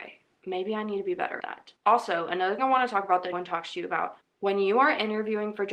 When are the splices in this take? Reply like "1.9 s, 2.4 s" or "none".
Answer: 1.4 s, 1.8 s, 2.6 s, 3.3 s, 4.2 s